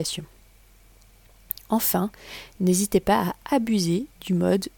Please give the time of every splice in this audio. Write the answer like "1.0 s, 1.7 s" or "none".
none